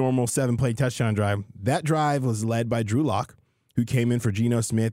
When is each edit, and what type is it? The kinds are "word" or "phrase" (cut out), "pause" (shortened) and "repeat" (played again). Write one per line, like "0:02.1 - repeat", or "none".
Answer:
none

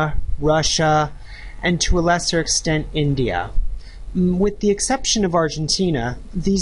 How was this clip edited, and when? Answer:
none

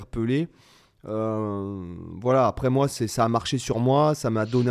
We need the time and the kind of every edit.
none

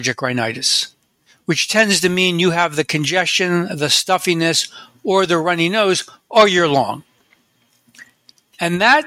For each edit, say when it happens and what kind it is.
none

